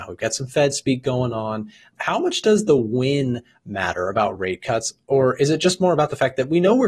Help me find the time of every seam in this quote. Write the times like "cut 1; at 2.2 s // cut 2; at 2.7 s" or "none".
none